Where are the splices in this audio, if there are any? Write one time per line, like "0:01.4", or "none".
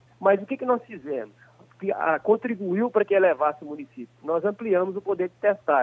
none